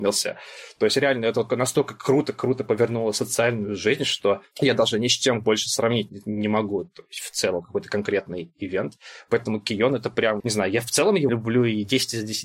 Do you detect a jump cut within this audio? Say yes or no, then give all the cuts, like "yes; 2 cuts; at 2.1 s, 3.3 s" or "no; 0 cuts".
yes; 4 cuts; at 1.5 s, 4.5 s, 10.4 s, 11.3 s